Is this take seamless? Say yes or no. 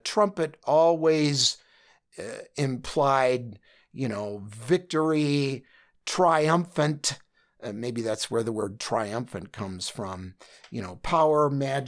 yes